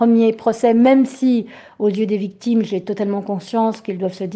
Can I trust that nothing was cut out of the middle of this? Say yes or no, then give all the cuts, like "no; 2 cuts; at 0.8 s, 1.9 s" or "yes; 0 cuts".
yes; 0 cuts